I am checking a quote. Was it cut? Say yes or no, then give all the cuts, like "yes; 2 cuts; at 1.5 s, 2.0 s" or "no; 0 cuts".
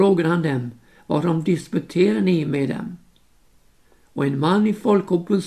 no; 0 cuts